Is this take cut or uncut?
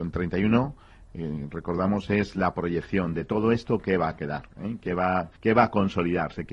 cut